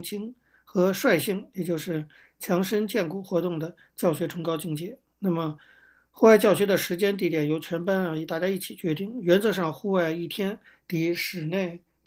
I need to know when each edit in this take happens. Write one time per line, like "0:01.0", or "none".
none